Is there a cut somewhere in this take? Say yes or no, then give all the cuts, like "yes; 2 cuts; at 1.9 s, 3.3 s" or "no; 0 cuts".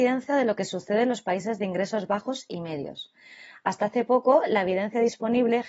no; 0 cuts